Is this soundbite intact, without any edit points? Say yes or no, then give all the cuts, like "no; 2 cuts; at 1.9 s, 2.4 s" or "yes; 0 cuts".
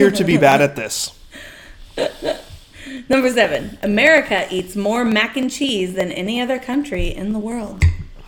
yes; 0 cuts